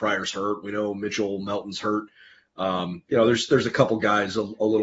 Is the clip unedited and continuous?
yes; 0 cuts

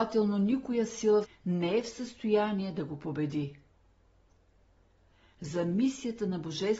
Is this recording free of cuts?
no; 1 cut; at 1.2 s

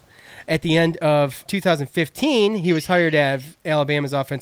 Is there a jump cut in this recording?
yes; 1 cut; at 1.5 s

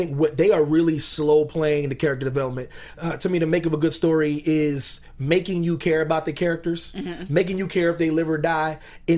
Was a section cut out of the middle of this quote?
no; 0 cuts

